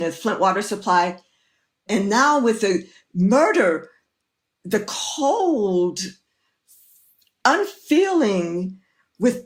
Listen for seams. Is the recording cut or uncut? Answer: uncut